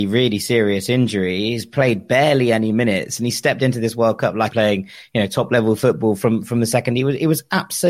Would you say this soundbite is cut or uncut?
cut